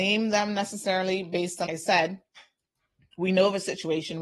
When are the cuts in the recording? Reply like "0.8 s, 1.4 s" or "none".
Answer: 1.7 s